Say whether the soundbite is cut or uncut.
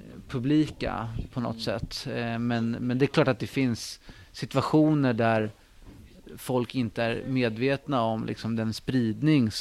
uncut